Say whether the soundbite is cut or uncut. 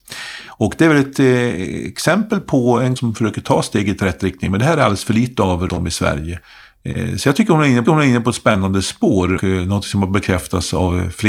cut